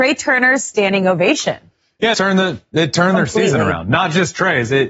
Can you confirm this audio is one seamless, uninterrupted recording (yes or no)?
no